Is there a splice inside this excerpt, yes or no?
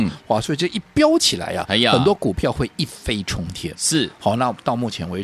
no